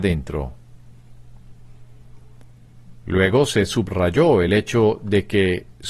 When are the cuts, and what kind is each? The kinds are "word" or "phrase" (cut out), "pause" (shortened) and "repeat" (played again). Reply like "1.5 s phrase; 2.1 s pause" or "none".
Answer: none